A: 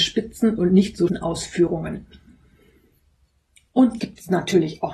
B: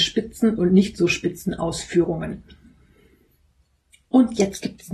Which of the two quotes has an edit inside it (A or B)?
A